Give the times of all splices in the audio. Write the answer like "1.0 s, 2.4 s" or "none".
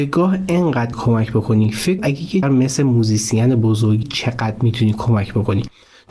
0.9 s, 2.0 s, 2.4 s, 4.0 s

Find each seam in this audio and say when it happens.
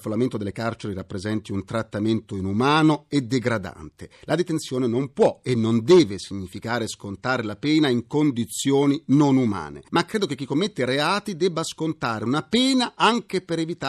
none

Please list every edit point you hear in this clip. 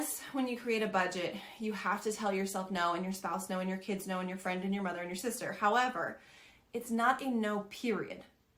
none

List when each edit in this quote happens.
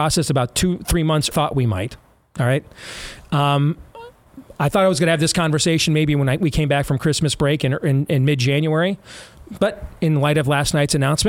1.3 s

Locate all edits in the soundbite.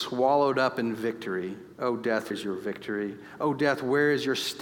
1.7 s, 2.3 s

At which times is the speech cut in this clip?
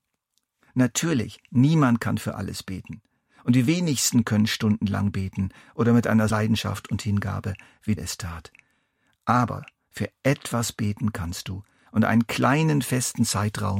6.3 s, 8.0 s

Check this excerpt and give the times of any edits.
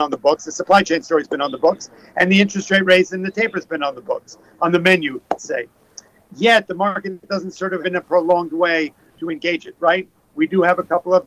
5.4 s, 7.8 s, 9.2 s

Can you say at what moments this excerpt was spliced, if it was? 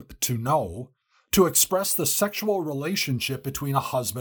1.0 s

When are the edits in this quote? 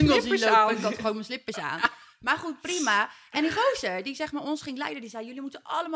none

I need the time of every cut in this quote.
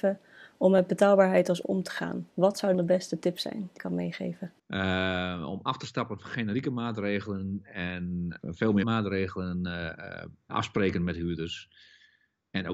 1.6 s, 2.3 s, 2.7 s, 3.8 s, 4.6 s, 8.4 s, 8.8 s, 10.5 s

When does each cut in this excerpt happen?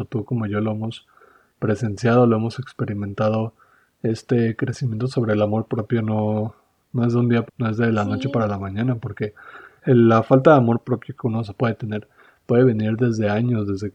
7.5 s

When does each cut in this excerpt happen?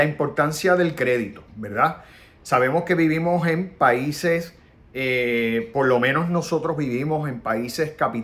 1.5 s

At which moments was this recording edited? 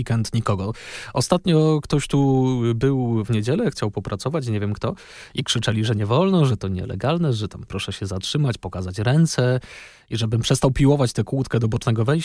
none

